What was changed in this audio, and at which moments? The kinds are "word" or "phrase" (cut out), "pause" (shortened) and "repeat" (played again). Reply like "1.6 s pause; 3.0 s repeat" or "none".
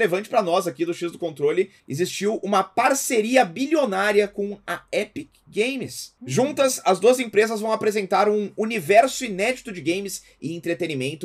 1.8 s pause; 6.2 s pause